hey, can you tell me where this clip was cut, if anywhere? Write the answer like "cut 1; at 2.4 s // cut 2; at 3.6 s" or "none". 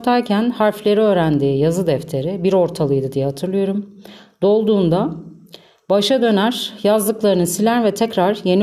none

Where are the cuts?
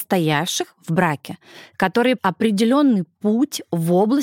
cut 1; at 2.2 s

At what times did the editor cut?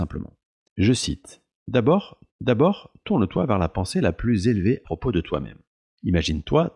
cut 1; at 2.3 s // cut 2; at 4.8 s // cut 3; at 5.7 s

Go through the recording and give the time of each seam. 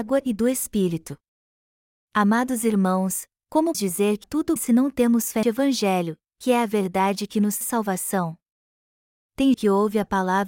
cut 1; at 3.7 s // cut 2; at 4.2 s // cut 3; at 4.6 s // cut 4; at 5.4 s // cut 5; at 7.6 s // cut 6; at 9.5 s

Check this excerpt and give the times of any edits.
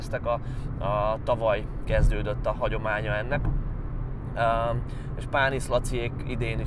none

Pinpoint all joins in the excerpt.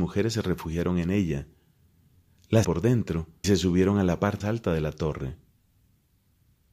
cut 1; at 2.6 s // cut 2; at 3.4 s // cut 3; at 4.4 s

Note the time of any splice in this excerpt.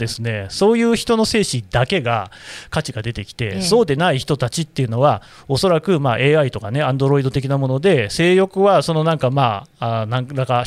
none

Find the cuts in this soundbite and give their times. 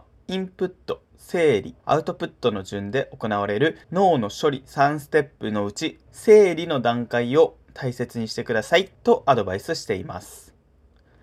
cut 1; at 1.8 s // cut 2; at 3.8 s // cut 3; at 6.1 s // cut 4; at 8.9 s

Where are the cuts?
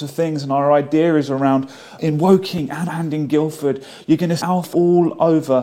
cut 1; at 2.0 s // cut 2; at 2.9 s // cut 3; at 4.4 s // cut 4; at 4.7 s

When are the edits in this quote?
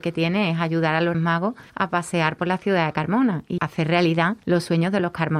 cut 1; at 1.1 s // cut 2; at 1.7 s // cut 3; at 3.6 s // cut 4; at 4.4 s

